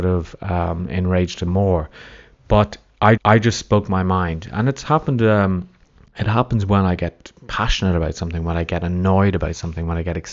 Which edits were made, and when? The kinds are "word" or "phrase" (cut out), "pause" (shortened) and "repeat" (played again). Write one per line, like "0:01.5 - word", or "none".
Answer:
0:01.5 - word
0:03.2 - repeat
0:06.0 - pause